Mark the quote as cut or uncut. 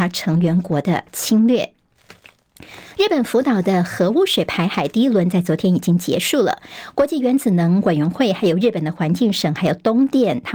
uncut